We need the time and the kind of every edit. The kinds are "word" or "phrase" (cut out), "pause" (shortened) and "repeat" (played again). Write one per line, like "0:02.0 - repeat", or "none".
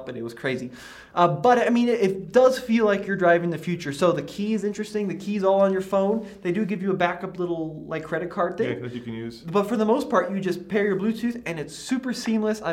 none

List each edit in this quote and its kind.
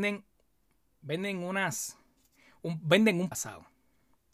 0:03.3 - word

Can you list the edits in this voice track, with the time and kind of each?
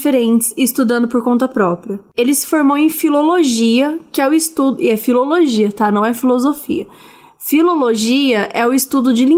none

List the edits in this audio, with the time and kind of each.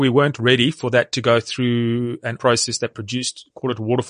0:02.4 - word

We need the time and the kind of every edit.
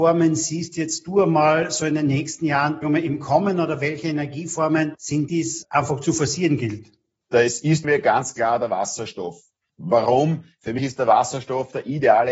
0:02.8 - word
0:05.3 - word
0:07.8 - word

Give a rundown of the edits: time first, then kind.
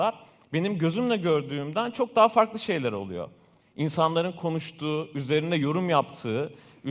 none

